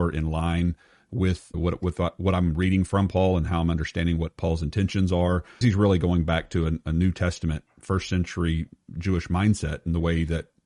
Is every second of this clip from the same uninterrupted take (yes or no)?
no